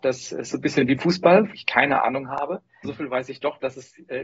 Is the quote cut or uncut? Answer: cut